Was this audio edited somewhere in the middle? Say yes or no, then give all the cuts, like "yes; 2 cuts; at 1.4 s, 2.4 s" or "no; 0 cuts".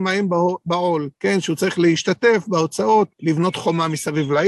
yes; 2 cuts; at 1.2 s, 3.1 s